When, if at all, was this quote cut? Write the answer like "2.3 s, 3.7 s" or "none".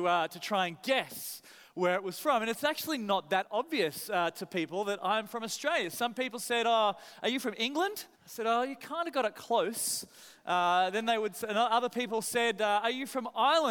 8.1 s